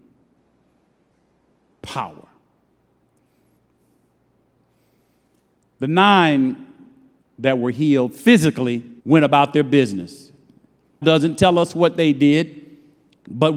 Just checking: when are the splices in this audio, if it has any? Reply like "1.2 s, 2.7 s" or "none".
9.0 s, 11.0 s